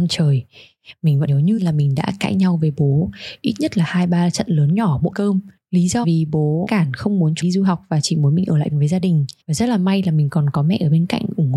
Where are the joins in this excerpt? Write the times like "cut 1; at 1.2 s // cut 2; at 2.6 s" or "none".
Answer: cut 1; at 1.3 s // cut 2; at 1.6 s // cut 3; at 5.1 s // cut 4; at 6.0 s // cut 5; at 6.7 s // cut 6; at 7.4 s // cut 7; at 8.7 s // cut 8; at 9.4 s